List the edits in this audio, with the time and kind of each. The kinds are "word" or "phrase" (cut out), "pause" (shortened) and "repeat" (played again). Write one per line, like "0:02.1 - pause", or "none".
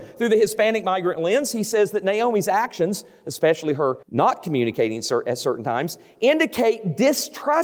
0:04.0 - pause